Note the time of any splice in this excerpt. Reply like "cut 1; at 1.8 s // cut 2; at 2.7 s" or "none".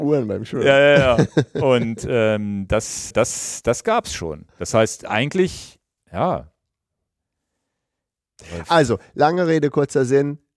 cut 1; at 3.1 s // cut 2; at 4.5 s // cut 3; at 6.0 s